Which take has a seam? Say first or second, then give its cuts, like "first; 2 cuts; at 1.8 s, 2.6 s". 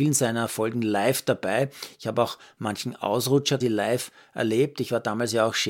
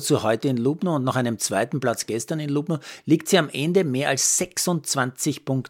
first; 1 cut; at 3.6 s